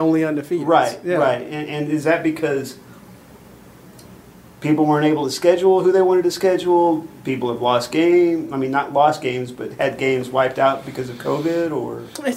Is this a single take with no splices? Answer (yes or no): yes